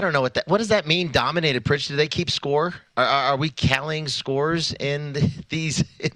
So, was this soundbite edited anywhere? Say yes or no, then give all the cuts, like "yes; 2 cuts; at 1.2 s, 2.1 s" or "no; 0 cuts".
yes; 1 cut; at 4.8 s